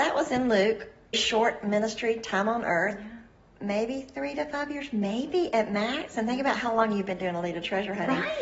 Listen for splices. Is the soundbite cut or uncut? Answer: cut